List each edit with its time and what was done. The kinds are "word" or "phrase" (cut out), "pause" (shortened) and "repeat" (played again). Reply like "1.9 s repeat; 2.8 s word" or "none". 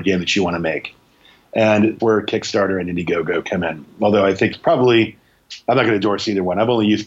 2.0 s word; 4.5 s word